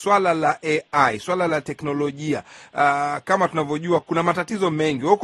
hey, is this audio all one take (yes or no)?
yes